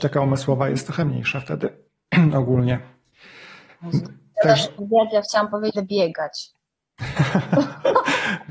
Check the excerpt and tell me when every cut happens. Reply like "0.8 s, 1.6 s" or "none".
4.8 s, 5.7 s